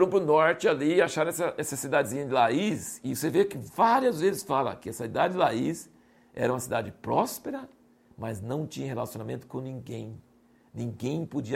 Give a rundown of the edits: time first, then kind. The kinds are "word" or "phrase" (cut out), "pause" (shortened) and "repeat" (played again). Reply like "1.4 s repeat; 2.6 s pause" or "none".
none